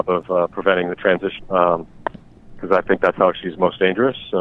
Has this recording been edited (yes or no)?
yes